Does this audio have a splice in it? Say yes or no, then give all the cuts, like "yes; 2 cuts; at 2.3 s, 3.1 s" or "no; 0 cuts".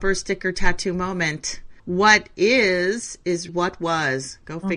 yes; 2 cuts; at 1.8 s, 3.5 s